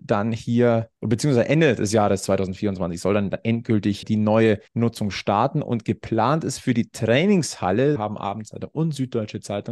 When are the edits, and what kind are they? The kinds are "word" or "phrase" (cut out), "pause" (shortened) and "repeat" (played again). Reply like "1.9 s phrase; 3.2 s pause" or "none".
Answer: 1.0 s pause; 4.0 s word; 4.7 s pause; 8.0 s word